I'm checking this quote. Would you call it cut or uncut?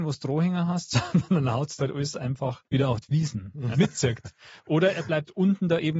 cut